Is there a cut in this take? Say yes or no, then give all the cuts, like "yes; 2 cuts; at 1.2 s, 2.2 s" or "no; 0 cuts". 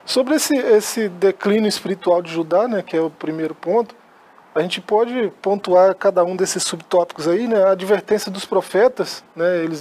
no; 0 cuts